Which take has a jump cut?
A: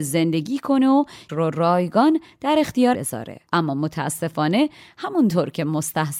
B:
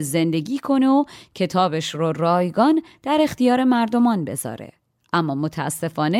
A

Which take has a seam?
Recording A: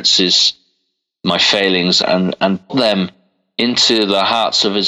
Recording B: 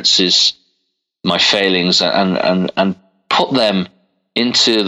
A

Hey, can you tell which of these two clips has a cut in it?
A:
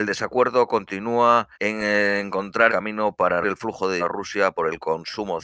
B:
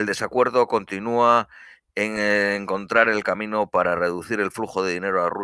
A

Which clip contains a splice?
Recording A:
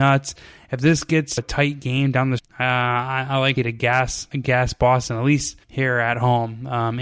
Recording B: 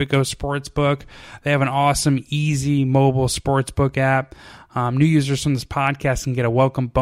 A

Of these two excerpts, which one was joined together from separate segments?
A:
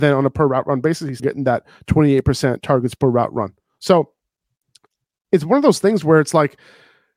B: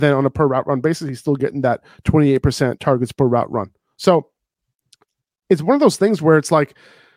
A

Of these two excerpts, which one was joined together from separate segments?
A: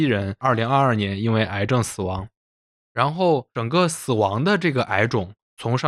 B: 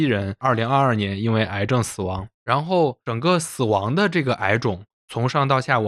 B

